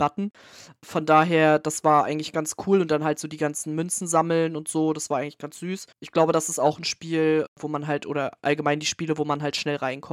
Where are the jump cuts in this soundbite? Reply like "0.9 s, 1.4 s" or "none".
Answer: 5.9 s